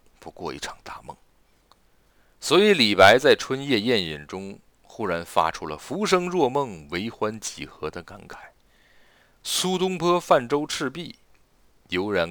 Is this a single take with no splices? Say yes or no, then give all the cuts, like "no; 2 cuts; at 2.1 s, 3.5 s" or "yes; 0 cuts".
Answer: yes; 0 cuts